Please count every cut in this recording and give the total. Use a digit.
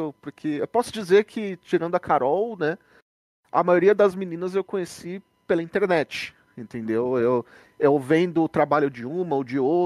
0